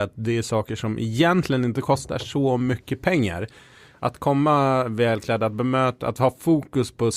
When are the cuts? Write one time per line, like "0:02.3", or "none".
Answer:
none